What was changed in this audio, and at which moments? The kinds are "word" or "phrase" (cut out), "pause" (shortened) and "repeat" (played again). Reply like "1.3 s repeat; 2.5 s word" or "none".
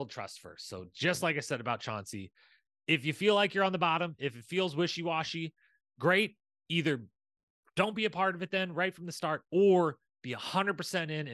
none